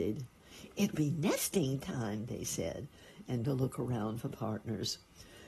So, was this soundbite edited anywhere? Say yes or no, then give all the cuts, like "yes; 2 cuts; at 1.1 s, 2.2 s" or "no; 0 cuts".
yes; 2 cuts; at 0.9 s, 3.4 s